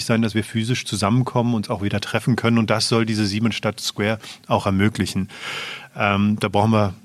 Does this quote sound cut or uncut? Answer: uncut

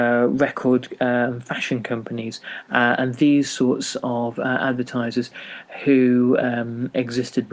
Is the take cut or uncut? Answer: uncut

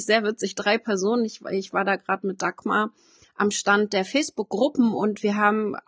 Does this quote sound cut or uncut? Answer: uncut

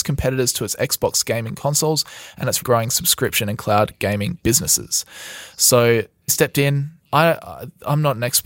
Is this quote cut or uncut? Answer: cut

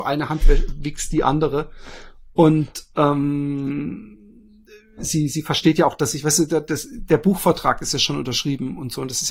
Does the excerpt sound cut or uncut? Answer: uncut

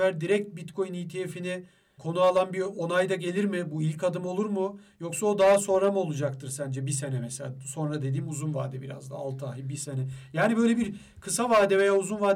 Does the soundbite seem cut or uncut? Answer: uncut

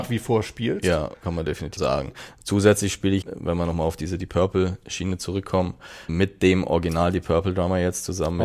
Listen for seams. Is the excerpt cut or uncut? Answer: cut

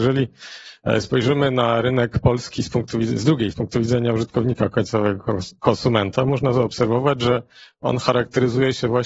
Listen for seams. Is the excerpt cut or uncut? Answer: cut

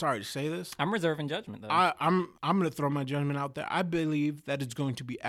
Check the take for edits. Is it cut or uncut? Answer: cut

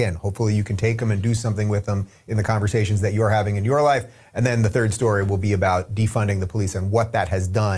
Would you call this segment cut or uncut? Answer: uncut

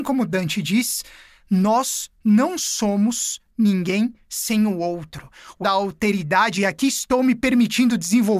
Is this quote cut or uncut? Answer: cut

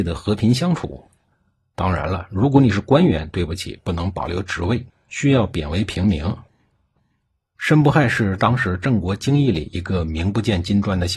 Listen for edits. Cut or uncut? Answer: uncut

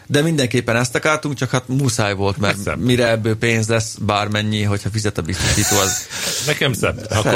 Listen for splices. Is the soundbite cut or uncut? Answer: uncut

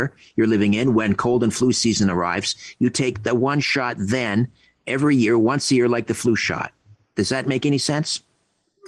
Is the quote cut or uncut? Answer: uncut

